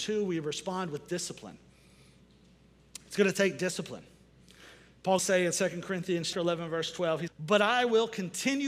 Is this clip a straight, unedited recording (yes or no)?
no